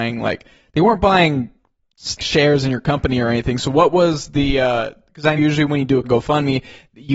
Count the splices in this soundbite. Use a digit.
3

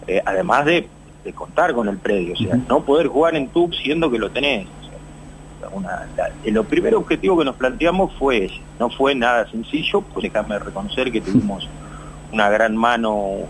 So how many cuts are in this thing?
5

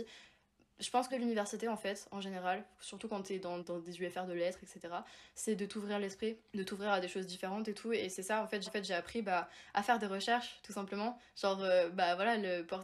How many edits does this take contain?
4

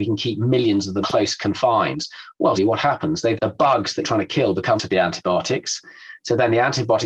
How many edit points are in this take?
5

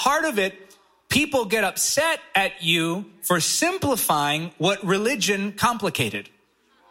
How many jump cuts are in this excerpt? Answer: 0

